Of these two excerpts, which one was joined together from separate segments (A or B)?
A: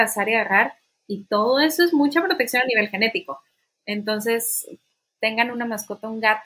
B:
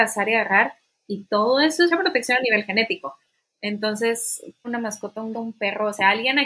B